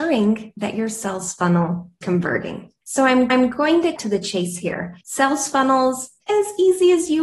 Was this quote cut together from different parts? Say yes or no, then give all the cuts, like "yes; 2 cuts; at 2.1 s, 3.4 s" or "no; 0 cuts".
yes; 5 cuts; at 2.0 s, 3.3 s, 4.0 s, 5.0 s, 6.2 s